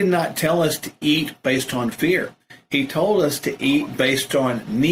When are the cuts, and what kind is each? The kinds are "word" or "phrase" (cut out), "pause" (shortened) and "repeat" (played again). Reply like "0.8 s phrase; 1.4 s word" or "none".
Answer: none